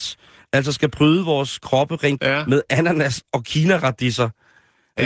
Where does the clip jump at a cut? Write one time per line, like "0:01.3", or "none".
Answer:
0:02.2